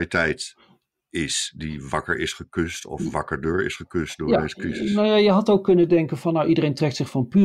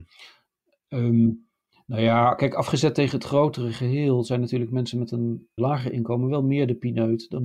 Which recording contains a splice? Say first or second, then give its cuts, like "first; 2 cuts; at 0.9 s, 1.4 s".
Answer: second; 1 cut; at 5.6 s